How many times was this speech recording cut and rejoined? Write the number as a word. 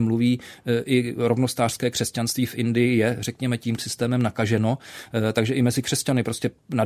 one